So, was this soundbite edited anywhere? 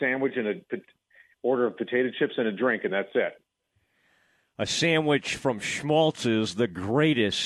no; 0 cuts

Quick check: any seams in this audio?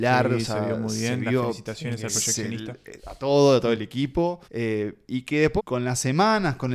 yes; 2 cuts; at 4.4 s, 5.6 s

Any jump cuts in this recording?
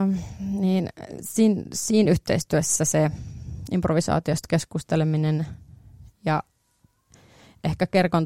no; 0 cuts

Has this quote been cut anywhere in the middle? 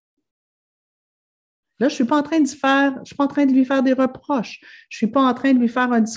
no; 0 cuts

